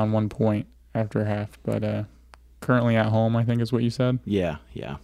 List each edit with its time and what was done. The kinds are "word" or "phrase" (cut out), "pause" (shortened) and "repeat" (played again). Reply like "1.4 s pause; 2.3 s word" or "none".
none